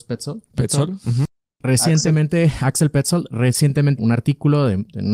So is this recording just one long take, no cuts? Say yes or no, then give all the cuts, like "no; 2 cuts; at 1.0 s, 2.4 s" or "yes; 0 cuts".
no; 1 cut; at 4.0 s